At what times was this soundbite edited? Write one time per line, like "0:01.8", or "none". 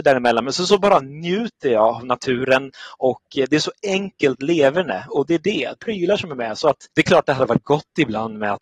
0:05.8
0:06.9